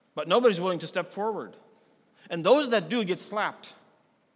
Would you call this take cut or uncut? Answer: uncut